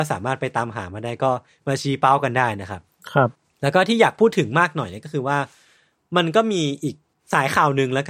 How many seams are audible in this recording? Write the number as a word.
zero